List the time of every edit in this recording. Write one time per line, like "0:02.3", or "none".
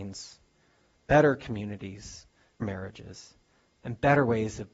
0:02.6